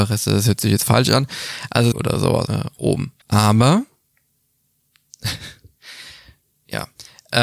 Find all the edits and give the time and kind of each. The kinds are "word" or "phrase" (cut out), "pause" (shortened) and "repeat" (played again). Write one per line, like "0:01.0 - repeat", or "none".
0:01.9 - phrase
0:02.5 - word
0:03.2 - pause